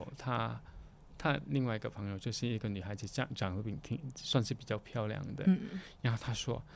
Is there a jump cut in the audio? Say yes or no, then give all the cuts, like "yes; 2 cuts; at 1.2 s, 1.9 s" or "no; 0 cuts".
no; 0 cuts